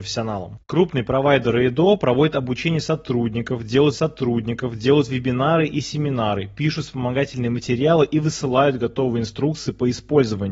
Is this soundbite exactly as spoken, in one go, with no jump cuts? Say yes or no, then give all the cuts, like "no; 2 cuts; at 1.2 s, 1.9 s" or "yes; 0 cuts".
no; 1 cut; at 3.9 s